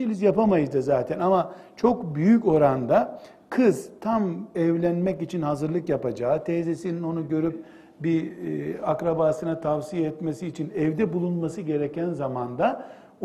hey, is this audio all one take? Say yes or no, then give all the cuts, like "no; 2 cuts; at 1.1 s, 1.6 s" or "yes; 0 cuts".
yes; 0 cuts